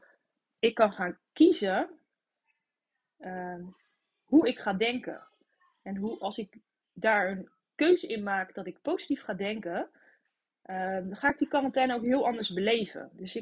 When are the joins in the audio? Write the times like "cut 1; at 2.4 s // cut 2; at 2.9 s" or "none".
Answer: none